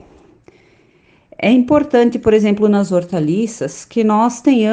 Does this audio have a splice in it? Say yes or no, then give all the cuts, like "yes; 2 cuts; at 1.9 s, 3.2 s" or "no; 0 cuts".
no; 0 cuts